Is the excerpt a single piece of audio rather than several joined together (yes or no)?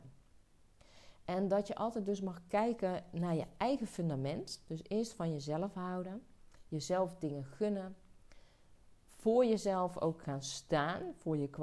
yes